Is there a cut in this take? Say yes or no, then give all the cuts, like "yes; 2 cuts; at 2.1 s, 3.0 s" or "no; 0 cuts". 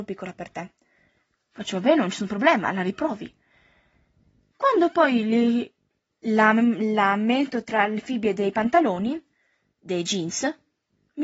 no; 0 cuts